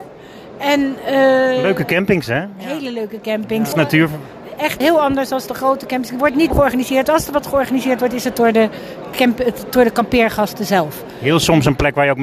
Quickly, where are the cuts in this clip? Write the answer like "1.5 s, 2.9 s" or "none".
3.7 s, 4.8 s, 6.5 s

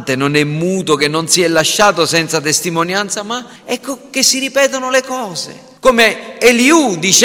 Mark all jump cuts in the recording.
3.6 s, 5.8 s

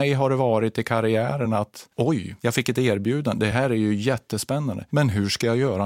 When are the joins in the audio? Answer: none

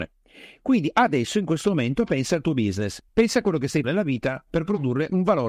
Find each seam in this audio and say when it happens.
3.1 s, 3.8 s

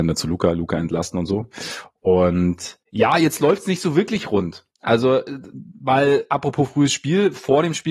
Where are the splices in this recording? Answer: 2.8 s, 4.7 s

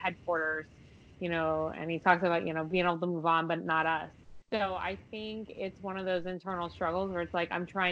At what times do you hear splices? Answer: 4.4 s

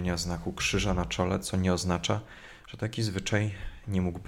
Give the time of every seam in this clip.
none

